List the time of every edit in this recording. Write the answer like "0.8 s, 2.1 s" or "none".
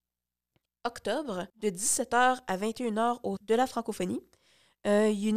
1.5 s, 3.4 s

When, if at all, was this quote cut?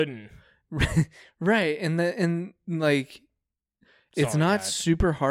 none

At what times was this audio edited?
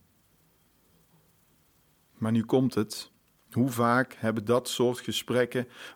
3.4 s

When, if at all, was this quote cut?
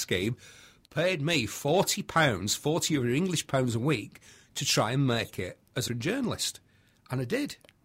5.9 s

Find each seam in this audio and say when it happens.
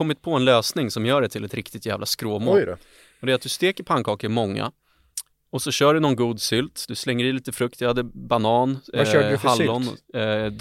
none

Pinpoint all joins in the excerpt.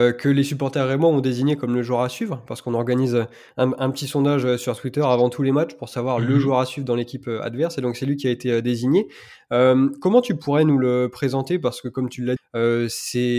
12.4 s

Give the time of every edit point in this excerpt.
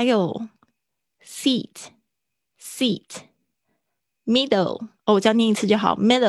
5.0 s

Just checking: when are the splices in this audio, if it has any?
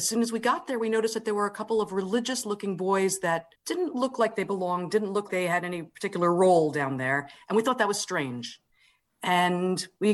3.6 s, 5.3 s

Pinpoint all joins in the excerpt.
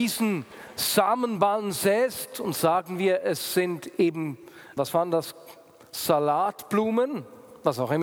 4.8 s

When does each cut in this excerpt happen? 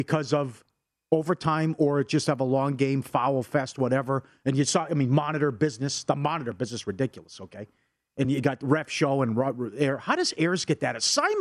none

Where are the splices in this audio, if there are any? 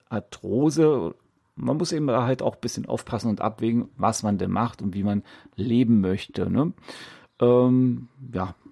none

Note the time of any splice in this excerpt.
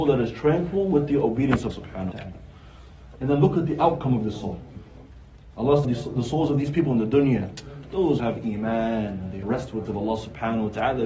1.7 s, 2.1 s, 5.8 s, 8.2 s, 9.4 s, 9.9 s

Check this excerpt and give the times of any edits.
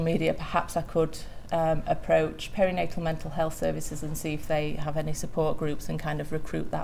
none

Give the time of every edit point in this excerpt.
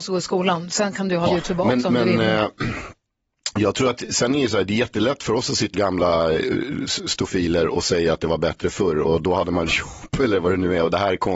1.3 s, 5.7 s, 9.7 s

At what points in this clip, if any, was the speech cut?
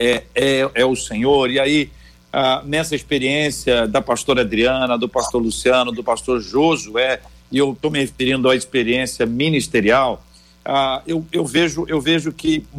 none

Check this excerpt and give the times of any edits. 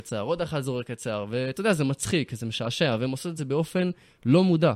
none

